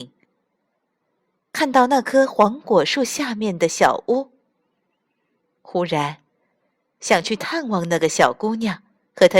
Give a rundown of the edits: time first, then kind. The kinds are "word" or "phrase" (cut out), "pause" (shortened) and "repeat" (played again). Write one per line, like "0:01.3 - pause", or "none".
none